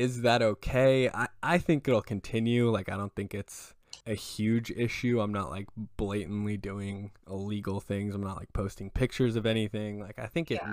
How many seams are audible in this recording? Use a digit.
2